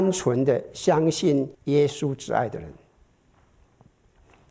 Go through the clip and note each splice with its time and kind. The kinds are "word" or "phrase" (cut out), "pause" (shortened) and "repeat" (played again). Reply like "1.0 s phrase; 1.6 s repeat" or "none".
1.5 s pause